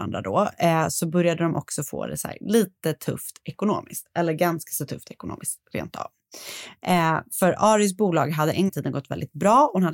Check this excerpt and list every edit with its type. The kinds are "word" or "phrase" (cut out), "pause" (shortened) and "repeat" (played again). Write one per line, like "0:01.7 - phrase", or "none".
0:08.7 - word